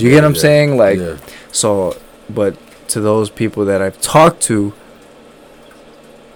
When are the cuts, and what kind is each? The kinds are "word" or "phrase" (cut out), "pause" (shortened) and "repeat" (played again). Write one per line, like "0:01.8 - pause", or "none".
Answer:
none